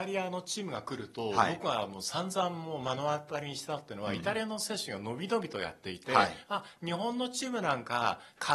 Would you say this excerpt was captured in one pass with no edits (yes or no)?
yes